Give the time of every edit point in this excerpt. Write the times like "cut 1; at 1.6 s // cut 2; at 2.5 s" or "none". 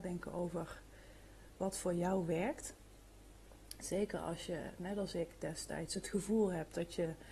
none